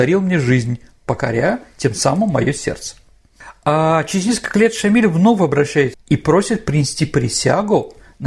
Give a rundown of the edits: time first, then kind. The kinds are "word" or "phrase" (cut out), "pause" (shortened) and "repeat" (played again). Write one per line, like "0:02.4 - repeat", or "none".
0:05.9 - phrase